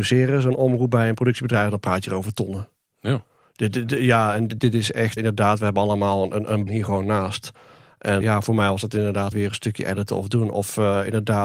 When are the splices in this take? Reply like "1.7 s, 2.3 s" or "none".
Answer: 4.6 s, 5.2 s, 6.7 s, 8.2 s, 9.3 s